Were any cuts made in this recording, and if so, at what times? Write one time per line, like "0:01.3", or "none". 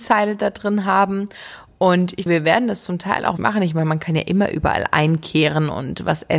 0:02.3
0:03.4